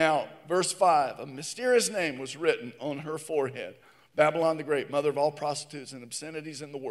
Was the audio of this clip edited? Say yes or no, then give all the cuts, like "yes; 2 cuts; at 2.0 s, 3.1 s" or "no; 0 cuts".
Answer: no; 0 cuts